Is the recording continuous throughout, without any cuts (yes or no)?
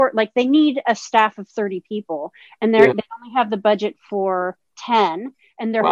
yes